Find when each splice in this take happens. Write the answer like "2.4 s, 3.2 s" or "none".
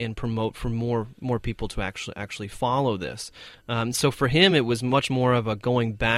none